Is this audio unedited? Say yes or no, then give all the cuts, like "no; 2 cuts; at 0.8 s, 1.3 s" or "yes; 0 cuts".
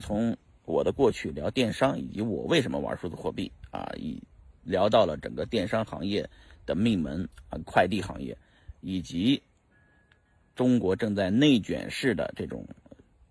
yes; 0 cuts